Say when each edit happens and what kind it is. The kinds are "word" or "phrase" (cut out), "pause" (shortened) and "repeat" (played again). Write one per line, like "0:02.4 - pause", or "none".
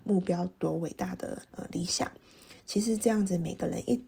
0:01.5 - pause
0:02.6 - pause